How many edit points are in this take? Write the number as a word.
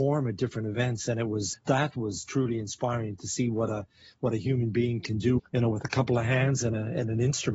two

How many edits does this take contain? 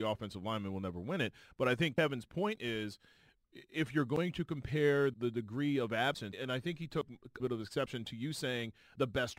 three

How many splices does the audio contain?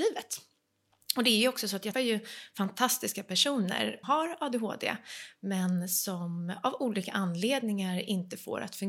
two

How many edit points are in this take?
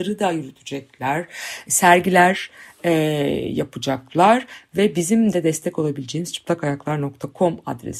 zero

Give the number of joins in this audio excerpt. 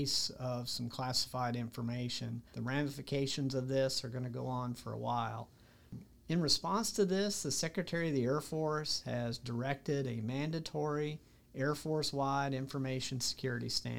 one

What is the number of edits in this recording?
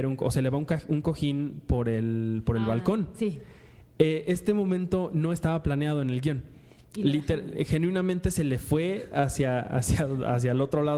zero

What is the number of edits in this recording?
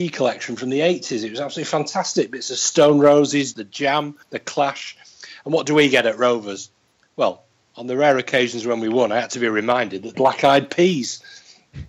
three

